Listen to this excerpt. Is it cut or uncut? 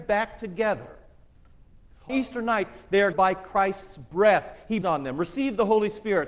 cut